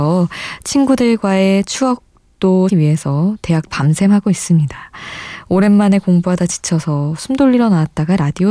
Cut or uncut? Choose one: cut